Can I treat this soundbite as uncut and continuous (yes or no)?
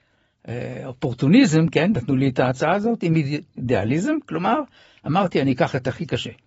yes